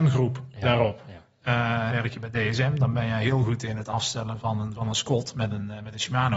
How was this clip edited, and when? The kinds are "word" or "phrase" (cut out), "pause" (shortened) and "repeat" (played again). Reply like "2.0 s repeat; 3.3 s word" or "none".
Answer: 1.9 s word

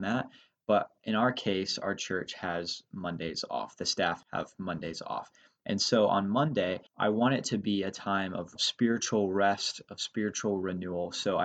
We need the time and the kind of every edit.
none

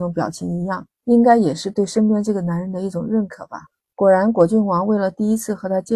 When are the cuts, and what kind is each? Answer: 0.9 s pause

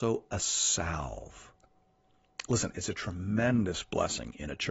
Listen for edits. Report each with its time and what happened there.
none

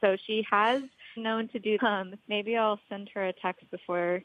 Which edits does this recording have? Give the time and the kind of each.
1.2 s word; 1.8 s word; 2.2 s word

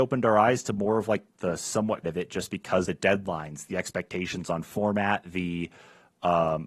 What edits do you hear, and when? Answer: 1.3 s word; 2.0 s phrase; 2.8 s word

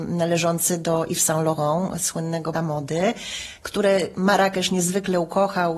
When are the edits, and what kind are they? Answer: 2.5 s word

